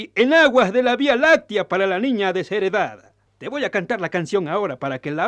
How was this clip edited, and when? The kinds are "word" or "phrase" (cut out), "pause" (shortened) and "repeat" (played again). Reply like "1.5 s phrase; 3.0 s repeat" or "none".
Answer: 3.3 s pause